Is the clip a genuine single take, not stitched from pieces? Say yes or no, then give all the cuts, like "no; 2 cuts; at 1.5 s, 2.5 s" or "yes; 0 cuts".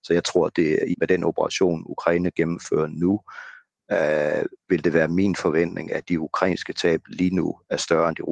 no; 1 cut; at 0.9 s